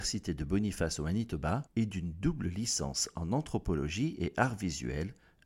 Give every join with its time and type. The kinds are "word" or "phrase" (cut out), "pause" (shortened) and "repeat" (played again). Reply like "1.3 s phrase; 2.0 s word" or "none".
1.7 s pause